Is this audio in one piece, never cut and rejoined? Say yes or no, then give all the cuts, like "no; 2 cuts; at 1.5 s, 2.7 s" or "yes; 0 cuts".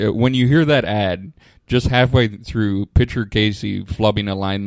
yes; 0 cuts